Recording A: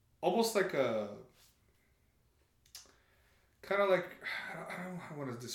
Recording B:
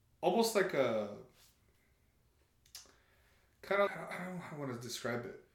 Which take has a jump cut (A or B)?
B